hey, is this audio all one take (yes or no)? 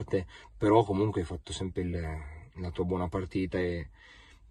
yes